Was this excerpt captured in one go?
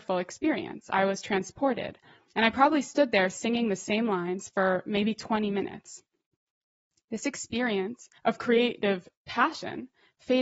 no; 1 cut; at 8.2 s

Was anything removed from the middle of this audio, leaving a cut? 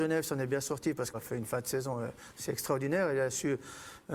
yes; 1 cut; at 1.1 s

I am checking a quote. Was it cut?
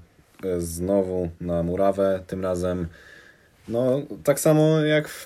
no; 0 cuts

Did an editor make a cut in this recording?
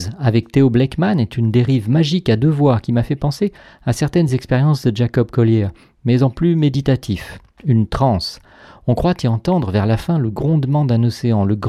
no; 0 cuts

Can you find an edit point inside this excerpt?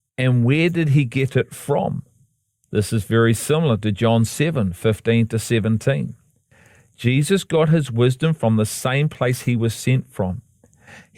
no; 0 cuts

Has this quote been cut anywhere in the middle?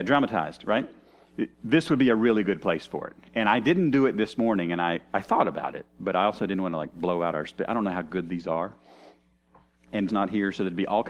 yes; 2 cuts; at 1.5 s, 10.1 s

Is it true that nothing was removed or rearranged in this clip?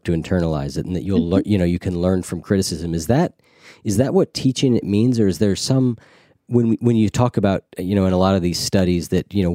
yes; 0 cuts

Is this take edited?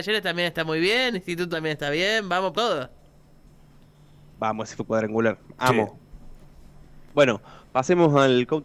yes; 4 cuts; at 1.1 s, 1.5 s, 2.5 s, 4.8 s

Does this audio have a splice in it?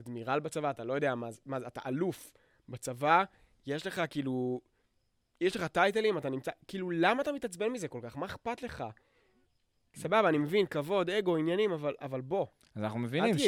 no; 0 cuts

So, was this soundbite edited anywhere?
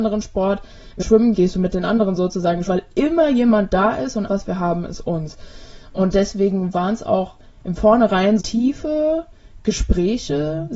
yes; 5 cuts; at 1.0 s, 1.3 s, 2.7 s, 4.3 s, 8.4 s

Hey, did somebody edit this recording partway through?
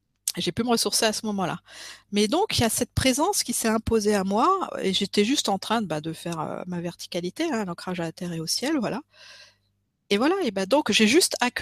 no; 0 cuts

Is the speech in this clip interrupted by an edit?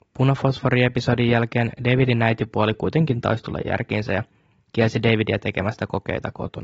no; 0 cuts

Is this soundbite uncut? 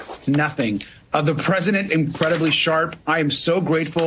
no; 1 cut; at 1.9 s

